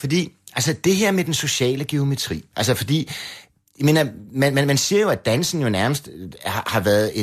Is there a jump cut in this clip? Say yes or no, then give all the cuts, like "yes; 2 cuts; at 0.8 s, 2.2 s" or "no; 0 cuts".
no; 0 cuts